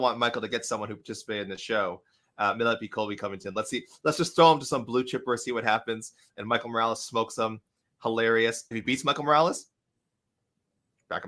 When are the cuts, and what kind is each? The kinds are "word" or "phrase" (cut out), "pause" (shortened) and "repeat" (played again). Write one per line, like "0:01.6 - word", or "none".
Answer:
none